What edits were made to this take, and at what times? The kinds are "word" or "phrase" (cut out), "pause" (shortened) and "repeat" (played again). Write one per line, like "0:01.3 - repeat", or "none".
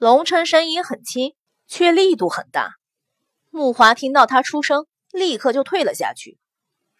none